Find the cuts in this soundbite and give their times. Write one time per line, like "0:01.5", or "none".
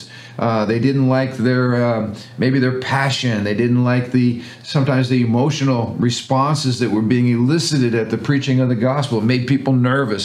none